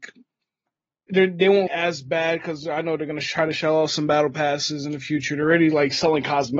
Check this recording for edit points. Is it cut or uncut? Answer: cut